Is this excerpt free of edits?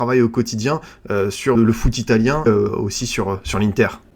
no; 2 cuts; at 1.5 s, 2.5 s

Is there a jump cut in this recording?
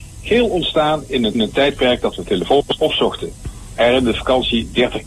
yes; 2 cuts; at 1.3 s, 2.8 s

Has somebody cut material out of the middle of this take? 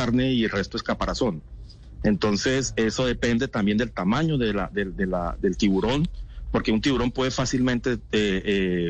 no; 0 cuts

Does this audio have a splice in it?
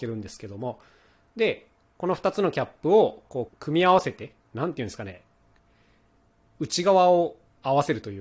yes; 1 cut; at 3.5 s

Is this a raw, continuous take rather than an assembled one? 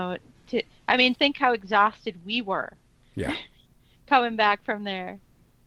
no; 1 cut; at 1.1 s

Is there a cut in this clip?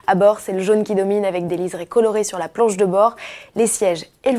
no; 0 cuts

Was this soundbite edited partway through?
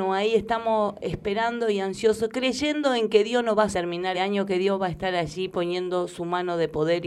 yes; 2 cuts; at 3.7 s, 4.1 s

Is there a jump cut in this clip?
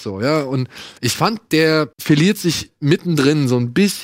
yes; 2 cuts; at 1.0 s, 1.9 s

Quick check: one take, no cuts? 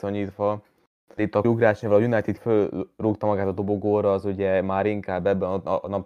no; 2 cuts; at 1.4 s, 2.4 s

